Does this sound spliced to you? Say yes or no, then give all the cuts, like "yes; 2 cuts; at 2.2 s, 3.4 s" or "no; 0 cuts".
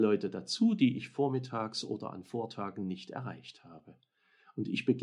no; 0 cuts